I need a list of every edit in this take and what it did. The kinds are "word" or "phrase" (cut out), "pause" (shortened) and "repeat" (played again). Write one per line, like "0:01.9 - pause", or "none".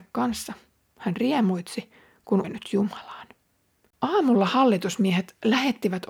0:02.4 - word